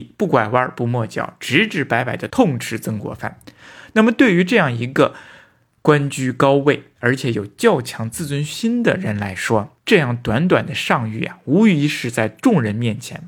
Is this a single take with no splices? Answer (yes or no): yes